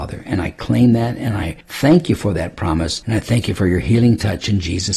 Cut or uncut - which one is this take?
uncut